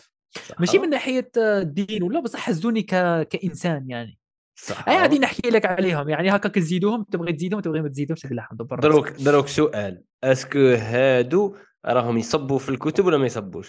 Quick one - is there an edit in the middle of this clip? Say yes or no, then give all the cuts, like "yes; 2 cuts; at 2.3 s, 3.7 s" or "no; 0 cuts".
no; 0 cuts